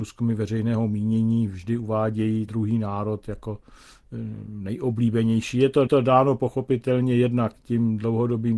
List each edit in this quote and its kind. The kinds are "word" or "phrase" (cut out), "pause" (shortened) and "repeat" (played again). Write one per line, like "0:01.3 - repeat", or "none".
0:02.5 - word
0:05.9 - repeat